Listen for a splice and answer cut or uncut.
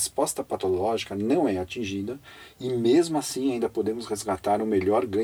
uncut